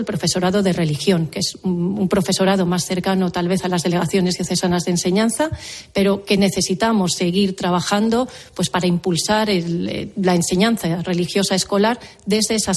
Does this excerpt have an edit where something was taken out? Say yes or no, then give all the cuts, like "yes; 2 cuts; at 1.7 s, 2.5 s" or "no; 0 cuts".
no; 0 cuts